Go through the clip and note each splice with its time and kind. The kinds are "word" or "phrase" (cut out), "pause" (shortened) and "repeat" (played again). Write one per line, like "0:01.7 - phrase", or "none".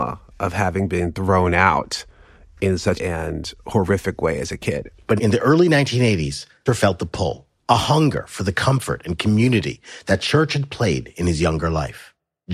0:03.0 - phrase
0:05.2 - word
0:06.7 - word
0:07.5 - pause